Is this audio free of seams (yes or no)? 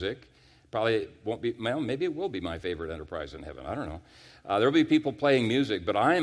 yes